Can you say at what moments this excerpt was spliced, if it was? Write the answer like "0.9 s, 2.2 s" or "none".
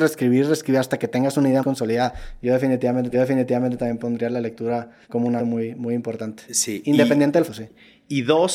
1.6 s, 3.1 s, 5.0 s, 5.4 s, 7.5 s